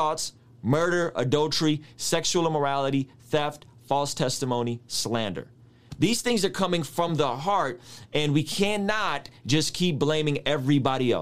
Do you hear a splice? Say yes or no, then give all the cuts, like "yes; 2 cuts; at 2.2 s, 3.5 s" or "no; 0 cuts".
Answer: no; 0 cuts